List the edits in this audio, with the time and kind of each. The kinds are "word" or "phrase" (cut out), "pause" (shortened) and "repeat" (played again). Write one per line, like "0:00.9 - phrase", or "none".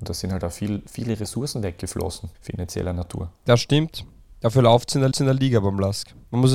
0:02.3 - pause
0:03.4 - pause
0:05.1 - repeat

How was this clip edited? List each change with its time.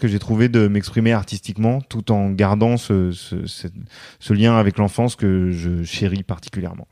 none

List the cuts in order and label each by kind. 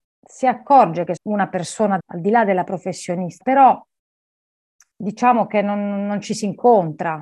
0:01.2 - word
0:02.0 - word
0:03.4 - word

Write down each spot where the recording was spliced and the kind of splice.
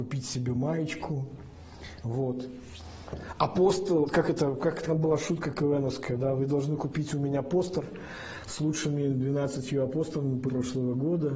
0:04.9 - word
0:10.5 - word

